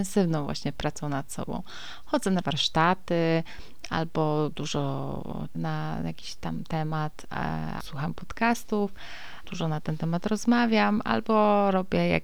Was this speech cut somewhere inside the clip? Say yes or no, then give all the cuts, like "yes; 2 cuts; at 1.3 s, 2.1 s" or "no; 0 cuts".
yes; 4 cuts; at 2.4 s, 5.5 s, 7.8 s, 9.4 s